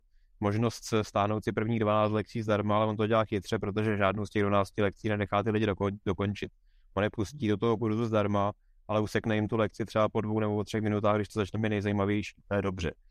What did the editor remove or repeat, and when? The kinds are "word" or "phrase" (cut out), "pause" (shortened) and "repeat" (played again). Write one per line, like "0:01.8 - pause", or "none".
none